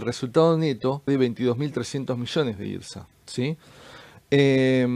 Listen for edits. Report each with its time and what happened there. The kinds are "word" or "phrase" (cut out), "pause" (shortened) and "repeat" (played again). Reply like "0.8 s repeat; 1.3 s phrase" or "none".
1.1 s word; 3.1 s pause